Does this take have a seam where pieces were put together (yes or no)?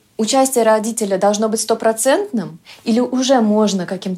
no